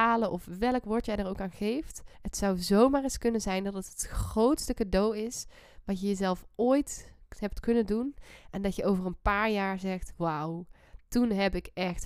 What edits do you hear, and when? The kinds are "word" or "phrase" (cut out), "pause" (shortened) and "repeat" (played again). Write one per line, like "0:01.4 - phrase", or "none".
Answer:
0:02.1 - pause